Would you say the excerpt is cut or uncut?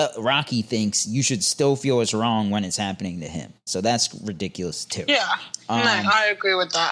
uncut